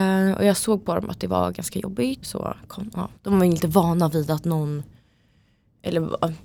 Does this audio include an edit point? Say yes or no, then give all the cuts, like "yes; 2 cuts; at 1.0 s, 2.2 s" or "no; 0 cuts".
yes; 2 cuts; at 2.2 s, 3.2 s